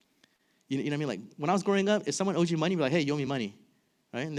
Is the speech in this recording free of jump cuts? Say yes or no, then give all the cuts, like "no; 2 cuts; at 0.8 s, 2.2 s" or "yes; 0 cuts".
yes; 0 cuts